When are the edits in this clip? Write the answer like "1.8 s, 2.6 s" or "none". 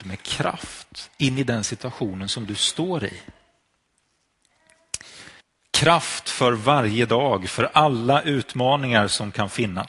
5.4 s